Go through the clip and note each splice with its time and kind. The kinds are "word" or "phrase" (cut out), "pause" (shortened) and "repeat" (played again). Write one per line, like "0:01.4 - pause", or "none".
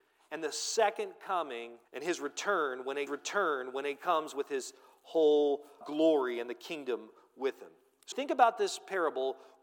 0:01.9 - pause
0:03.1 - repeat
0:05.8 - word
0:08.1 - phrase

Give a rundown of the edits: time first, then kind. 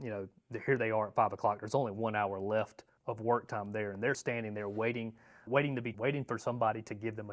0:03.0 - word
0:04.1 - word
0:05.5 - word
0:05.9 - word

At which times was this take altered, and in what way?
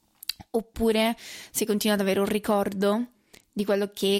none

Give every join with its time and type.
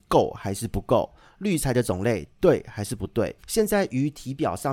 0:03.4 - pause

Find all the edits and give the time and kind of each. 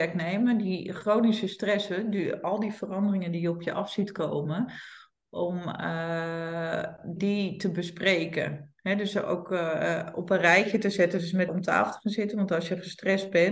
0:07.2 - word
0:11.5 - word

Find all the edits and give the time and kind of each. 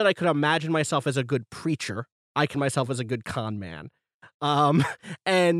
0:02.1 - pause
0:02.5 - word

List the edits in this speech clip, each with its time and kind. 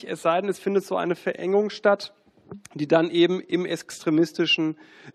none

